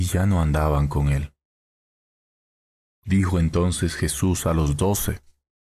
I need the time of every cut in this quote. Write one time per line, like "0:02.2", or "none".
none